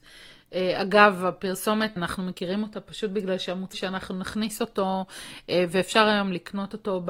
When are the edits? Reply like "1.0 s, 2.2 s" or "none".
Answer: 2.0 s, 3.7 s